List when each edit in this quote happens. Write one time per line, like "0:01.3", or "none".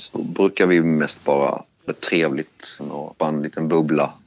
0:01.9
0:02.8
0:03.2